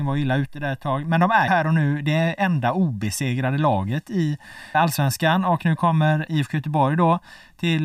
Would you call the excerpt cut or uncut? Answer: cut